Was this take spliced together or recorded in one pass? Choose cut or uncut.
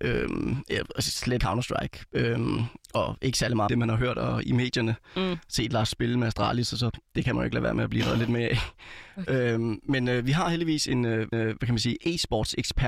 cut